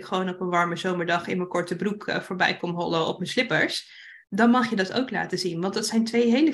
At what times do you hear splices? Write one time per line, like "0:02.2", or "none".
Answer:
0:04.2